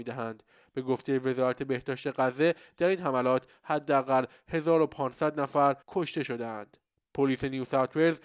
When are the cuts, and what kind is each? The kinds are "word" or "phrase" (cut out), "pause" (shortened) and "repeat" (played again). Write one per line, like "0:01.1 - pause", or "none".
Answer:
0:05.8 - pause
0:06.8 - pause